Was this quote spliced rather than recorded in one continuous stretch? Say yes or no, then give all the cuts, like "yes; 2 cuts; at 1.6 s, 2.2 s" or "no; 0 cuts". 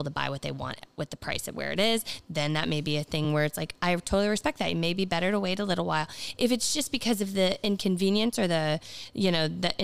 no; 0 cuts